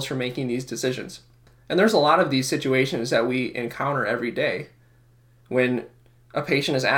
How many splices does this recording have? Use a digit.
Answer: 0